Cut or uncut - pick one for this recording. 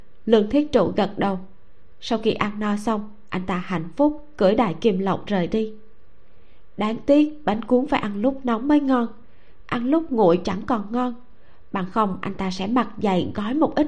uncut